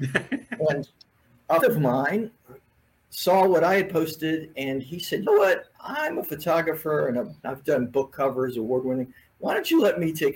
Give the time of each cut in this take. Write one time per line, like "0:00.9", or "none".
0:01.6
0:05.3
0:07.4